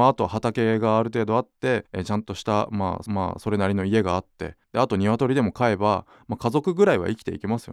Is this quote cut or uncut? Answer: cut